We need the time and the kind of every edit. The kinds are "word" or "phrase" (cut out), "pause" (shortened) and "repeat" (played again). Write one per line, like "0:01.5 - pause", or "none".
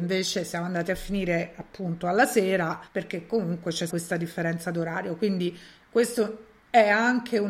0:02.9 - pause
0:03.9 - word

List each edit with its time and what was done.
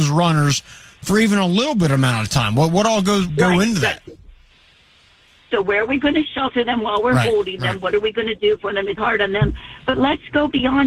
0:03.3 - word
0:09.0 - word

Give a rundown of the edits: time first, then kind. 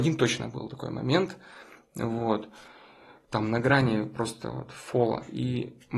none

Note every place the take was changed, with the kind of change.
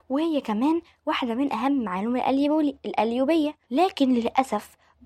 0:03.6 - pause

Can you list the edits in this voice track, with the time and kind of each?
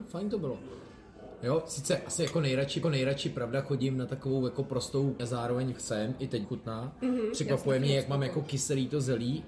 0:02.8 - repeat
0:05.2 - word
0:05.7 - word
0:06.4 - phrase

